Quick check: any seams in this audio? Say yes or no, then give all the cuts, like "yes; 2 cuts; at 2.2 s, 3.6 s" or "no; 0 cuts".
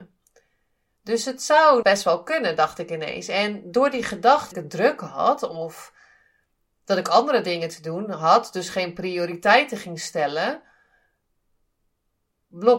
yes; 2 cuts; at 1.8 s, 4.5 s